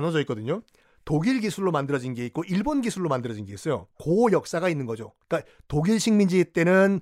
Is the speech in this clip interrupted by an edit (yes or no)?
yes